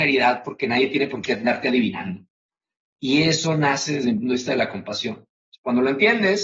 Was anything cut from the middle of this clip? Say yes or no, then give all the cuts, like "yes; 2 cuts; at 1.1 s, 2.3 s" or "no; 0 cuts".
no; 0 cuts